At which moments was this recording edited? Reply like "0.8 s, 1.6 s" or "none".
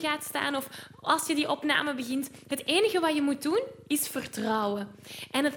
none

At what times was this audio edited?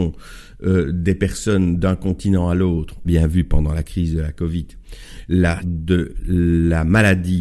3.0 s, 5.6 s

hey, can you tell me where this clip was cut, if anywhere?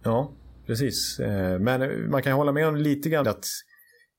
3.2 s

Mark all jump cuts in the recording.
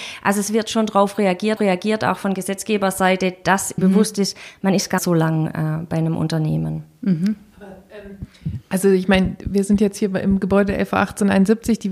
1.6 s, 3.8 s, 5.0 s

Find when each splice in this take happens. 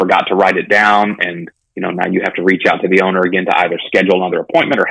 1.7 s

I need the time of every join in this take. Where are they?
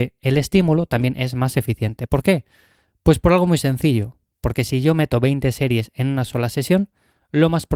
none

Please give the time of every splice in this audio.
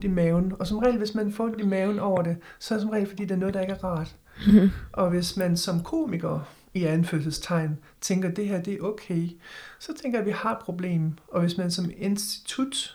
none

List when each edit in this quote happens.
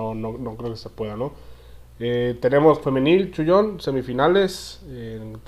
2.8 s

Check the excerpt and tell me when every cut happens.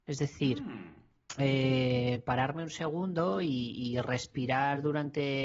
none

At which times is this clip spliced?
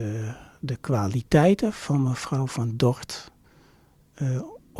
none

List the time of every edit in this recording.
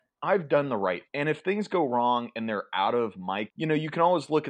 1.1 s, 3.5 s

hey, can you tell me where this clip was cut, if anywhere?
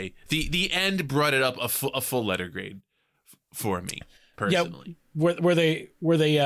none

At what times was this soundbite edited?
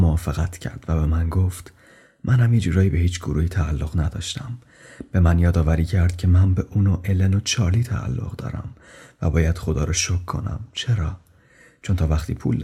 none

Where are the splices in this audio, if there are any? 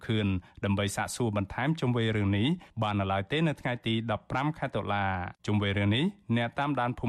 5.4 s

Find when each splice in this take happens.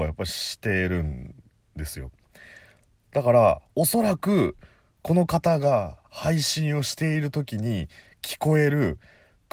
none

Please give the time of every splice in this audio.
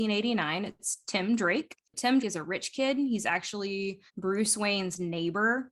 2.2 s, 4.1 s

